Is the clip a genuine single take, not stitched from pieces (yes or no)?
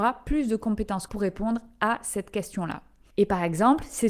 no